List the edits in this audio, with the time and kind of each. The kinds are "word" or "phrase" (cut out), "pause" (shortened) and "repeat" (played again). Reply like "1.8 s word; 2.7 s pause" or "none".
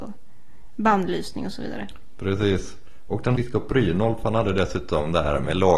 3.4 s phrase